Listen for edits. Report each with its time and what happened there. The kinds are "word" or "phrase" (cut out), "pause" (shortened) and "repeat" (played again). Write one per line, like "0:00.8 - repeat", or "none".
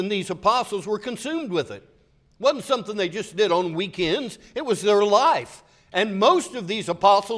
none